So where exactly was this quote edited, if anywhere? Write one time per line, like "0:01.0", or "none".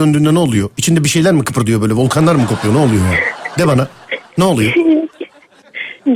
none

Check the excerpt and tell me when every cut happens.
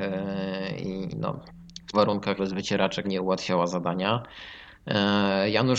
0:01.1
0:01.9
0:02.4
0:03.0

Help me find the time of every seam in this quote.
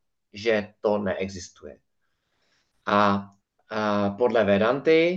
0:03.4

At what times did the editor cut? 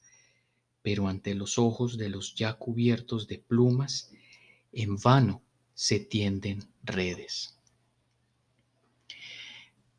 none

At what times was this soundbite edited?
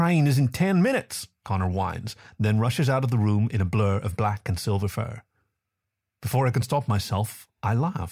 none

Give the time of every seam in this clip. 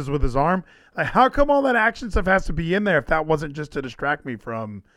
none

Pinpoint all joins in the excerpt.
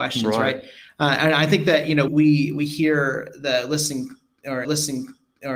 0:02.1
0:04.6

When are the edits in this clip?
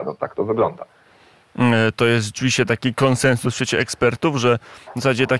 none

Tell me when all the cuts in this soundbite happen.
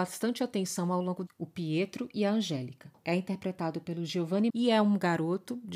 0:01.3
0:03.0
0:04.5

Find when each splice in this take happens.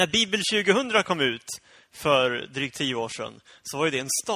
none

